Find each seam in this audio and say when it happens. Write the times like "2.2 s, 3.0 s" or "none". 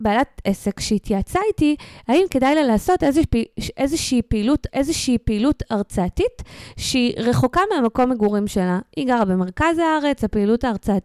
4.7 s